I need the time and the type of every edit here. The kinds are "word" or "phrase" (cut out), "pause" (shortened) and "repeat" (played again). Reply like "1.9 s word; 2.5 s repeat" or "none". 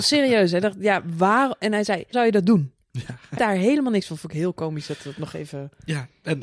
2.1 s word; 3.4 s word